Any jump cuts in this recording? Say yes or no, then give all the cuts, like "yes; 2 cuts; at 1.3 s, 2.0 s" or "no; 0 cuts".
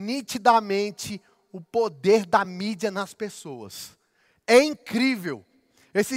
no; 0 cuts